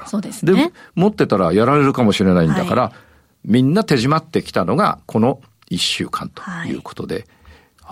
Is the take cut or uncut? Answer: uncut